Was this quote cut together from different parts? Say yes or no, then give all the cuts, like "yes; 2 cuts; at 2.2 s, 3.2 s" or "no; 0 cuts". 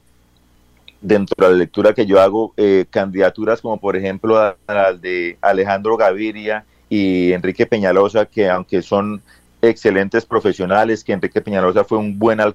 no; 0 cuts